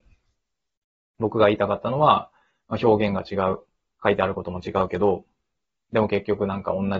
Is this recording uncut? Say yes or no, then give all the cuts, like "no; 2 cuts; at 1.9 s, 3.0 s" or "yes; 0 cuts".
yes; 0 cuts